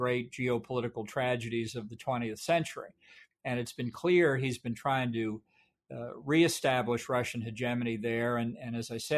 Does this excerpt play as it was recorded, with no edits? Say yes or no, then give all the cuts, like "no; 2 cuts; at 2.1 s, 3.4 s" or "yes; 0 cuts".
yes; 0 cuts